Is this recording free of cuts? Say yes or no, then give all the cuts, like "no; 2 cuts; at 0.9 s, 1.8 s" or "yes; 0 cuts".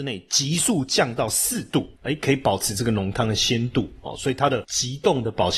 yes; 0 cuts